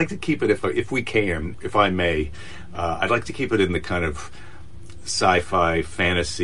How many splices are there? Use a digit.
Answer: 1